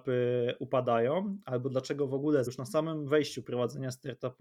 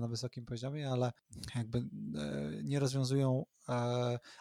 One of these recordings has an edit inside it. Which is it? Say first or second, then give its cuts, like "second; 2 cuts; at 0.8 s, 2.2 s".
first; 1 cut; at 2.5 s